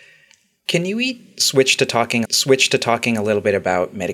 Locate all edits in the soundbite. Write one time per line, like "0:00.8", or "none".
0:02.2